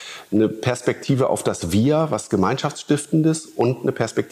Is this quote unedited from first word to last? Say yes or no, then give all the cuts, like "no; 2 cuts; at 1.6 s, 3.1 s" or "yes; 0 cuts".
yes; 0 cuts